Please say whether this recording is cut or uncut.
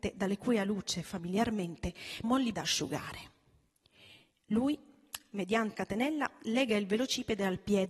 cut